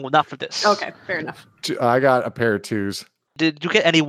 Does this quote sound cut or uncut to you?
uncut